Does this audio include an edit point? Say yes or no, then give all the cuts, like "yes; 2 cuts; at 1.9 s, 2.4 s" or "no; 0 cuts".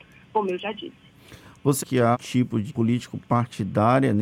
yes; 3 cuts; at 1.8 s, 2.1 s, 2.7 s